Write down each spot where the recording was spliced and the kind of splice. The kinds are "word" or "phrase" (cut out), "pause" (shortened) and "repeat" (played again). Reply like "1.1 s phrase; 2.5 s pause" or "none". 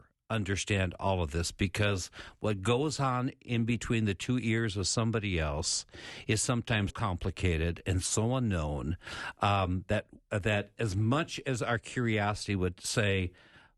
6.9 s word